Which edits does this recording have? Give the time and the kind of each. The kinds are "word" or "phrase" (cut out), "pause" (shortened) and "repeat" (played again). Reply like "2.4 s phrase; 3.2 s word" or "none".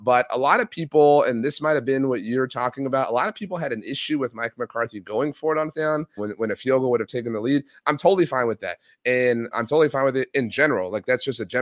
5.7 s word; 6.2 s word; 9.5 s word